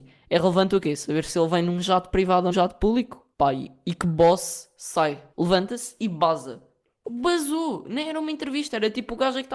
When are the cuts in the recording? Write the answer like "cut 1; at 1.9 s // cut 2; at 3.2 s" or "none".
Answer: cut 1; at 2.5 s // cut 2; at 3.3 s // cut 3; at 5.3 s // cut 4; at 7.0 s